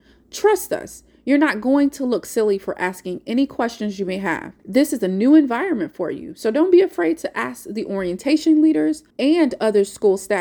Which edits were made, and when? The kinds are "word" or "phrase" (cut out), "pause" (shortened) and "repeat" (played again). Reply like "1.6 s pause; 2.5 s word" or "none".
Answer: 4.6 s pause; 9.1 s pause